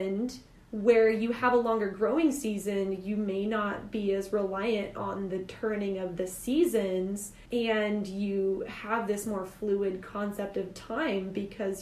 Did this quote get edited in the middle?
yes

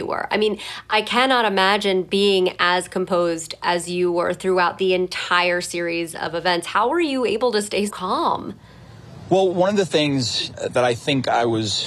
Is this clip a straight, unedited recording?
no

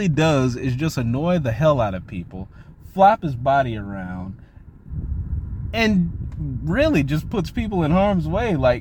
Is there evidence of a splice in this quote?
no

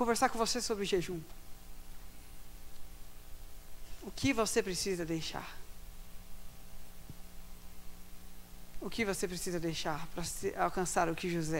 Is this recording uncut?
yes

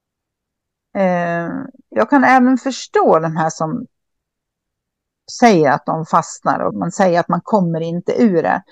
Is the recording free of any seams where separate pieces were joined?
no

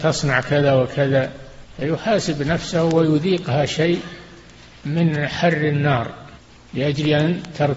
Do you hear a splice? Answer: no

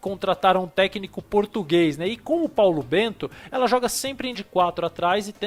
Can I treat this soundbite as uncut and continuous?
no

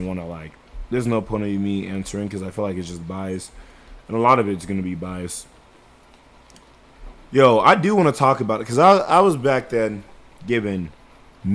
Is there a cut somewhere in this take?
no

